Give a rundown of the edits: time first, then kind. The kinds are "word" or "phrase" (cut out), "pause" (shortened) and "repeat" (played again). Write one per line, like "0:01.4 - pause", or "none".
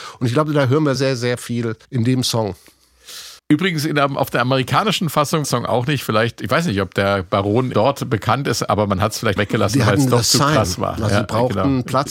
0:01.0 - word
0:01.8 - pause
0:03.4 - pause
0:05.4 - phrase
0:07.7 - word
0:09.4 - word